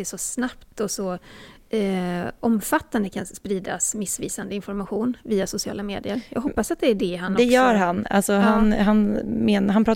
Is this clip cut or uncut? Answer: uncut